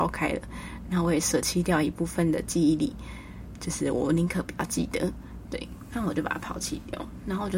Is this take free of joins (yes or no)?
yes